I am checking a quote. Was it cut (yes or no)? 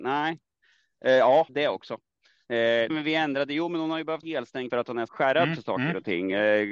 yes